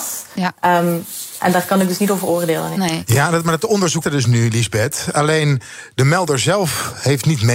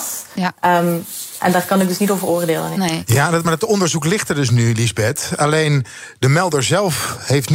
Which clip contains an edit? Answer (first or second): first